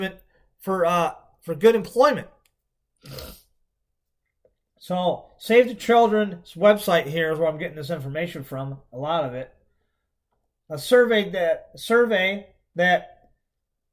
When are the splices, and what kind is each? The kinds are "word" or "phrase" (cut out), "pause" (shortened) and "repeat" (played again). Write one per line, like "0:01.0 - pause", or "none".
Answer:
none